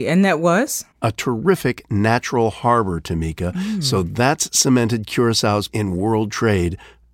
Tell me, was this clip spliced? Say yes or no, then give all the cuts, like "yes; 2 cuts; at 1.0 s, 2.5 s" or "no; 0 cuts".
yes; 2 cuts; at 0.9 s, 5.7 s